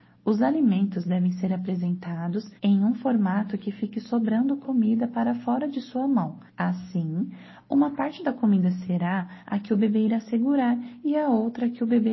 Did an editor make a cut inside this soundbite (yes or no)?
yes